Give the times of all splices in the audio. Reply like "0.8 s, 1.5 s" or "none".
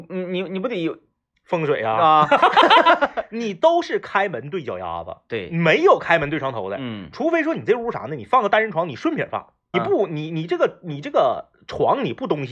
9.7 s